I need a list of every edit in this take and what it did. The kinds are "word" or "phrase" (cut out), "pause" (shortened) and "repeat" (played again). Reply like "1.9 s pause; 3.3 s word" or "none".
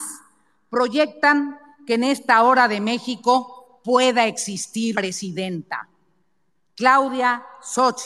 4.9 s word